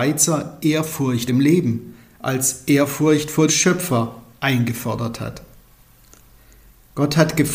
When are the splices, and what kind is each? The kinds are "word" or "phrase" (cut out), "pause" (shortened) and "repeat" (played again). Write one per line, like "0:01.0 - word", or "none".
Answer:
0:01.3 - word
0:03.5 - word